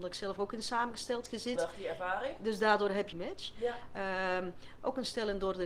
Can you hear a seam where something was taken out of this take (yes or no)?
yes